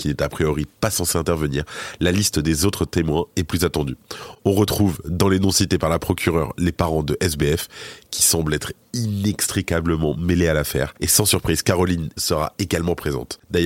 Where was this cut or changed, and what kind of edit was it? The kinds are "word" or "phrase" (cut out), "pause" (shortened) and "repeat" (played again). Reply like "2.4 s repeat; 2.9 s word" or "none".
12.2 s word